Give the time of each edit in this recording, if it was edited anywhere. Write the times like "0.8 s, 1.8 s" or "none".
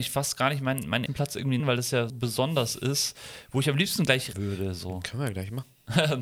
1.1 s, 1.6 s, 2.1 s, 4.3 s